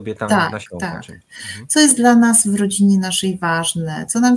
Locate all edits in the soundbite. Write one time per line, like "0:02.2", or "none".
none